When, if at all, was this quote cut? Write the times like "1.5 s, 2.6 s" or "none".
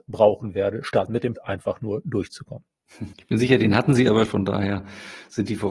1.4 s, 3.1 s, 4.3 s